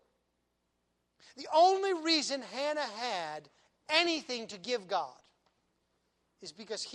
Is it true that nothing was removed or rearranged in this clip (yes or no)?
yes